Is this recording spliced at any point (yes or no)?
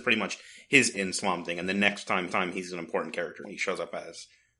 yes